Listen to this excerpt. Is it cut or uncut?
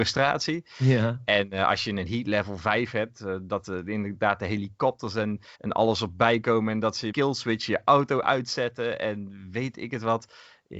cut